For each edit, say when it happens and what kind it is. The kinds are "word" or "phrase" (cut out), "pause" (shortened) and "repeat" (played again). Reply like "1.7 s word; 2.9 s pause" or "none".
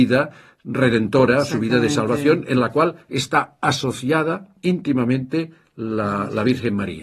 none